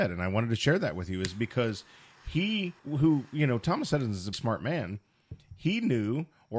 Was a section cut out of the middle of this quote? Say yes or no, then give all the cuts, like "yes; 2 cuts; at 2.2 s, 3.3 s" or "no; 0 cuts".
yes; 2 cuts; at 2.8 s, 4.3 s